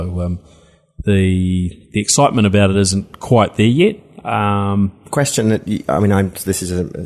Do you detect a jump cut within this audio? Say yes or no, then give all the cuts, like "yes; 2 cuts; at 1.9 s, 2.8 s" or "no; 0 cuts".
no; 0 cuts